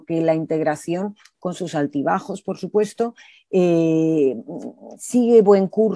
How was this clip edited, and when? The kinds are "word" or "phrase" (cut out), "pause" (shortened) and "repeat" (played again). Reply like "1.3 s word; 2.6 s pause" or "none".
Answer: none